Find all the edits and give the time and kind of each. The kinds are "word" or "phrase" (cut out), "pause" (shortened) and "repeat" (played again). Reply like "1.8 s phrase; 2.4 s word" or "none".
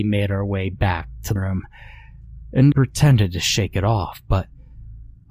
1.4 s word; 2.7 s word